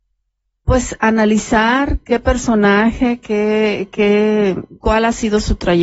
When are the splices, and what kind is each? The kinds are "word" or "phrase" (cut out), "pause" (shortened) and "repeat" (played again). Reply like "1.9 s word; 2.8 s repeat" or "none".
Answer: none